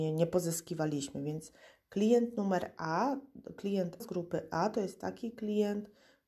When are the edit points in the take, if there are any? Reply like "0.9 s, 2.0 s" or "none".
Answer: 4.0 s

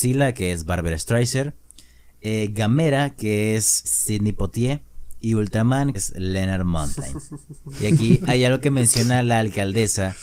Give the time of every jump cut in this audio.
3.8 s, 5.9 s

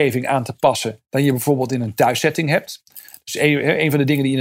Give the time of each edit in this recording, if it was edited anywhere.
1.0 s

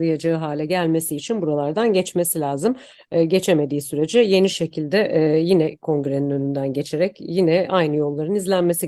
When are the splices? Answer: none

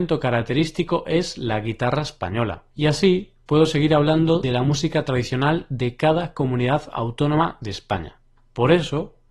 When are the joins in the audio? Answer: 2.7 s, 3.4 s, 4.4 s, 8.4 s

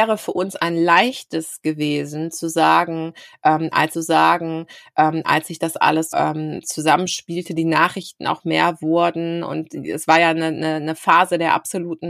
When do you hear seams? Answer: 3.9 s, 6.1 s

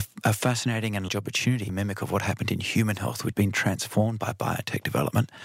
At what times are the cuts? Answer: 1.1 s, 1.7 s, 3.3 s

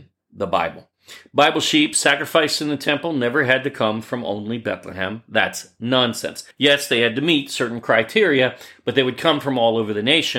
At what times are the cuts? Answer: 6.5 s

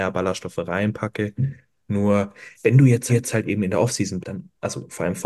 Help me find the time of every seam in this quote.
2.5 s, 3.1 s, 4.2 s

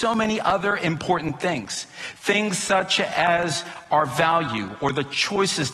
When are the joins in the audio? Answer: none

